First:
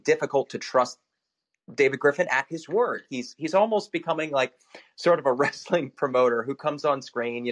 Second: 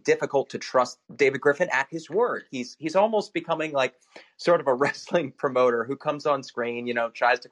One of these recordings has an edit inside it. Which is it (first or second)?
second